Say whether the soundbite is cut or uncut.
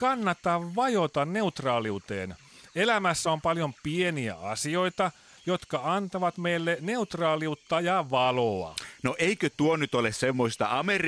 uncut